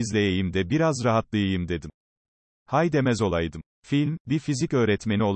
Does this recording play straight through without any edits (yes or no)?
yes